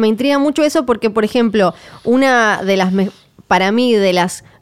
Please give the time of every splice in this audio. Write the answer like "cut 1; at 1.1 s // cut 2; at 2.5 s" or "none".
none